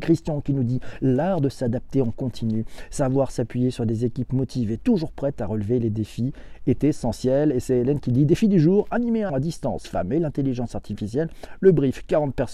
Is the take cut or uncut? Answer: cut